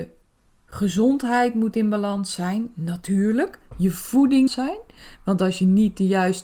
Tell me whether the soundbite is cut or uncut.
cut